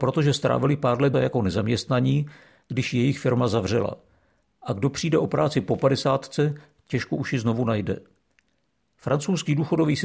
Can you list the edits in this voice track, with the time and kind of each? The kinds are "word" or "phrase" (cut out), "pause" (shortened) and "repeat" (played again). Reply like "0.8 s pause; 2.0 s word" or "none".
1.1 s word